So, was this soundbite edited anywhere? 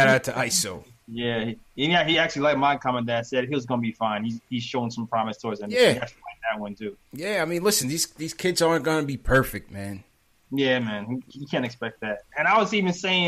no; 0 cuts

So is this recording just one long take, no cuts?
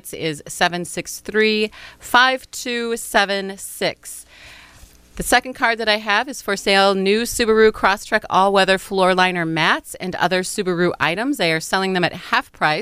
yes; 0 cuts

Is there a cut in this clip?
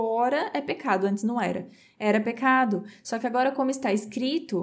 no; 0 cuts

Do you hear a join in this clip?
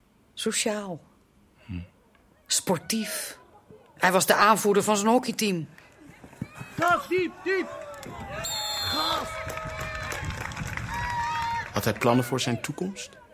no; 0 cuts

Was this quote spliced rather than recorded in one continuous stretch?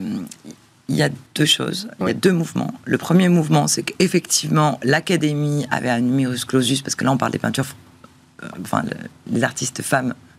yes; 1 cut; at 1.3 s

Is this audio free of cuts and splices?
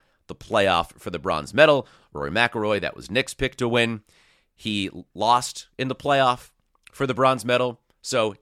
yes; 0 cuts

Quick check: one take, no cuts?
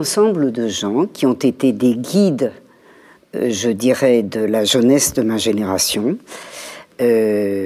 yes; 0 cuts

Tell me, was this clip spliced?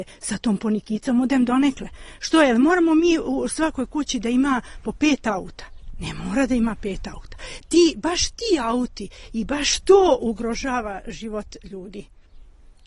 no; 0 cuts

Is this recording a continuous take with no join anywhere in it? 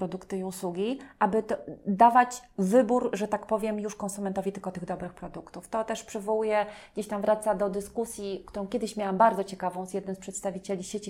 yes; 0 cuts

